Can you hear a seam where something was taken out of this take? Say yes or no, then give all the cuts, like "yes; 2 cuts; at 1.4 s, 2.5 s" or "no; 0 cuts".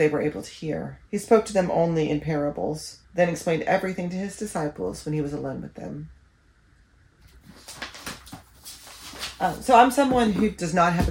yes; 2 cuts; at 1.1 s, 3.0 s